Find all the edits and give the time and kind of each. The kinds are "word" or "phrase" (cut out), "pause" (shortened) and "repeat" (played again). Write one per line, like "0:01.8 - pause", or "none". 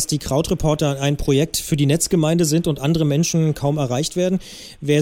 none